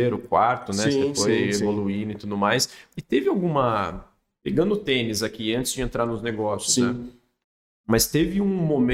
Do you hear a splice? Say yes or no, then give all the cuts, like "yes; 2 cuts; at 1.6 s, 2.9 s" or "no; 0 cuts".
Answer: no; 0 cuts